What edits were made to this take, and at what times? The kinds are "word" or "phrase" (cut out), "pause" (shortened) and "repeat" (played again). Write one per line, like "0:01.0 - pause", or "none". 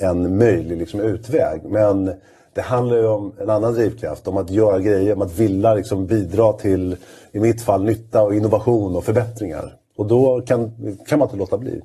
none